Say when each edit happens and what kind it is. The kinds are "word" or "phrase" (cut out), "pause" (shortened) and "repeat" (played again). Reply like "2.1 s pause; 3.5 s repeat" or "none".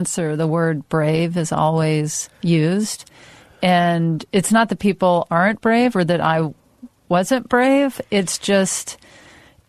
2.3 s pause